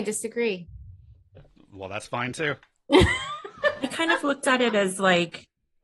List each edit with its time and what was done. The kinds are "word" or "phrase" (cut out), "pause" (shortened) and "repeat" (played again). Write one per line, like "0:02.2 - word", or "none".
none